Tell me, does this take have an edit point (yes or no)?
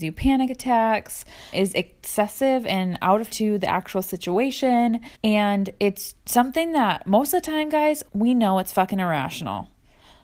yes